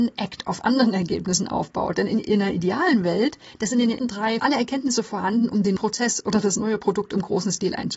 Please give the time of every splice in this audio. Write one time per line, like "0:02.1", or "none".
0:04.0
0:04.4
0:05.8